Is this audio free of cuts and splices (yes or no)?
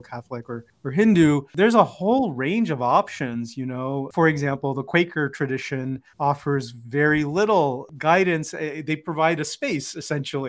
yes